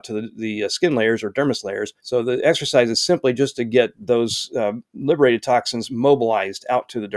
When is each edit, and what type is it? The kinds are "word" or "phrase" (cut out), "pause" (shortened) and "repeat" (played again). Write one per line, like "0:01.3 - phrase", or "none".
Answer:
0:02.0 - pause